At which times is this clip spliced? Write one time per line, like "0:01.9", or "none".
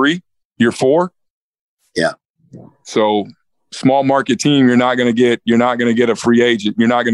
none